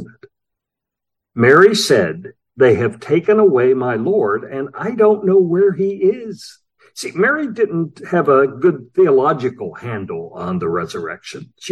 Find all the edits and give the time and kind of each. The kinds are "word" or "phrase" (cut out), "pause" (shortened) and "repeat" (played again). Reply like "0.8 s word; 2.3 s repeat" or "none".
6.8 s pause